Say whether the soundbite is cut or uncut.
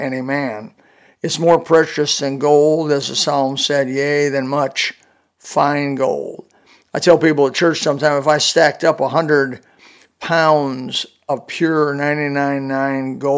uncut